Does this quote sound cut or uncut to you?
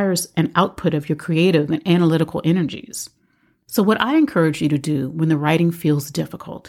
uncut